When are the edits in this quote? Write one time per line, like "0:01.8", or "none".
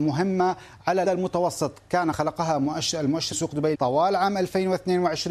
0:01.0
0:02.1
0:03.3
0:03.7